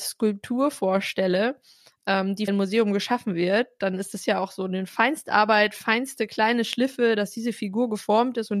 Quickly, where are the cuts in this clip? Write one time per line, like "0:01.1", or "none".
0:02.5